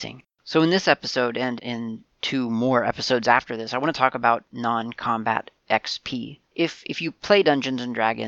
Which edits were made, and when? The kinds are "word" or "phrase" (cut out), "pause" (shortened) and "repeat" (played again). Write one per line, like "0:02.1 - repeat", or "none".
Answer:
0:01.6 - word
0:06.4 - pause